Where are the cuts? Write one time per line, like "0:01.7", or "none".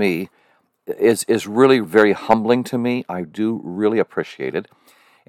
0:01.8